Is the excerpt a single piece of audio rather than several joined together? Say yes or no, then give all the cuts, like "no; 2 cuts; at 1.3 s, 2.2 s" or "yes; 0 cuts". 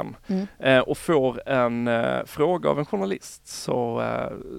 yes; 0 cuts